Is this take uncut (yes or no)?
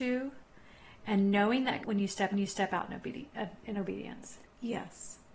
no